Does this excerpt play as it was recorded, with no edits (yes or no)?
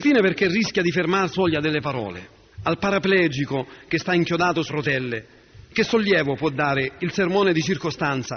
no